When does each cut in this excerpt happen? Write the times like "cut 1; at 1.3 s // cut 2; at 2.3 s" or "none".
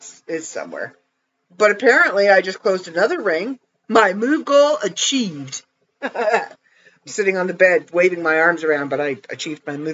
none